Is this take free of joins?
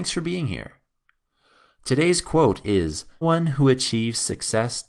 no; 1 cut; at 3.2 s

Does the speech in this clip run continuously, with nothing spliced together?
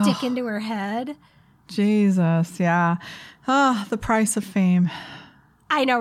yes; 0 cuts

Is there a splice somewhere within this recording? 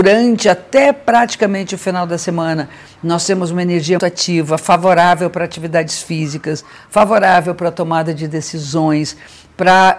yes; 1 cut; at 4.0 s

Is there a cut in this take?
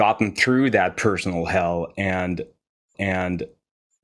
yes; 1 cut; at 2.9 s

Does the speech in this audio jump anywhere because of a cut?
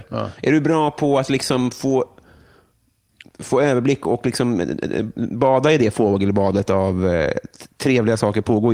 no; 0 cuts

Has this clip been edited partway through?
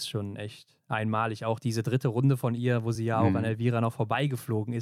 no; 0 cuts

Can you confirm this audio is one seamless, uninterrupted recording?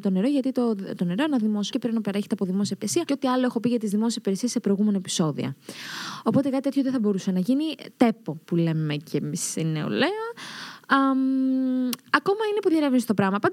no; 1 cut; at 1.7 s

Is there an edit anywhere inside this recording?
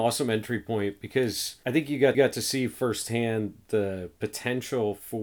yes; 1 cut; at 2.1 s

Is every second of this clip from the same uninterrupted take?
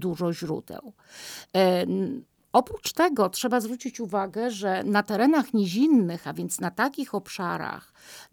yes; 0 cuts

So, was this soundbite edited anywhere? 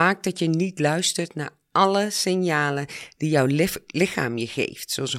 no; 0 cuts

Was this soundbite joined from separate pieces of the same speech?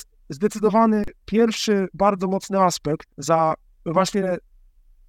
no; 0 cuts

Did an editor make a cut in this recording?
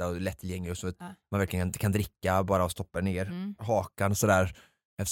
no; 0 cuts

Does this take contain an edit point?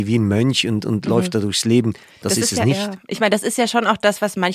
no; 0 cuts

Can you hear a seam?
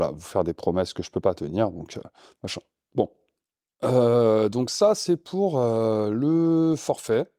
no; 0 cuts

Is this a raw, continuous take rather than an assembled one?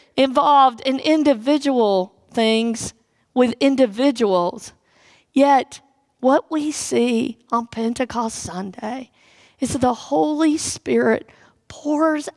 yes; 0 cuts

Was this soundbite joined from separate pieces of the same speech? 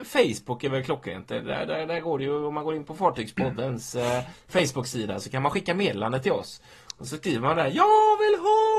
no; 0 cuts

